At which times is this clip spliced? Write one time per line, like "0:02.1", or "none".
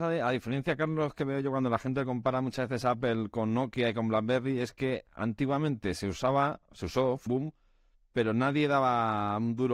0:07.3